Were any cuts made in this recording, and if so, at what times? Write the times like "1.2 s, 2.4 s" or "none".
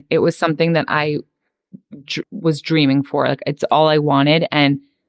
2.2 s